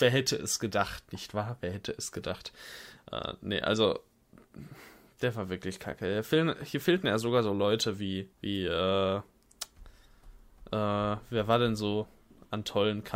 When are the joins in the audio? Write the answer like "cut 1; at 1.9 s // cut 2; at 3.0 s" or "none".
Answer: cut 1; at 8.3 s